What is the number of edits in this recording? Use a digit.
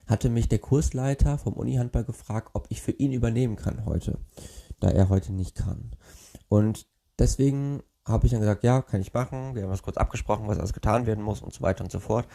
0